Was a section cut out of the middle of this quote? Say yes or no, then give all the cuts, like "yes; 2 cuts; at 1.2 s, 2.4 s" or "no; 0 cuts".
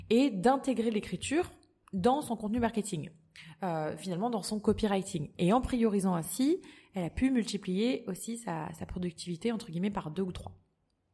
no; 0 cuts